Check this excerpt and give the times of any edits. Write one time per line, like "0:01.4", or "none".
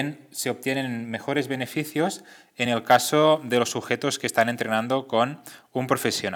none